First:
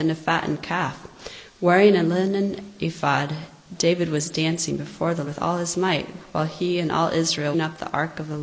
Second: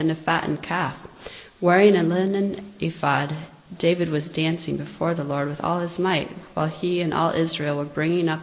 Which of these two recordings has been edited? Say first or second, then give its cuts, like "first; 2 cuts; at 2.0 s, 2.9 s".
first; 2 cuts; at 5.3 s, 7.5 s